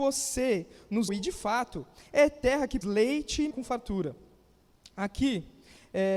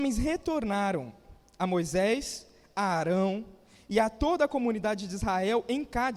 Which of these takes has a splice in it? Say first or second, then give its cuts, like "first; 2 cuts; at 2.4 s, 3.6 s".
first; 3 cuts; at 1.1 s, 2.8 s, 3.5 s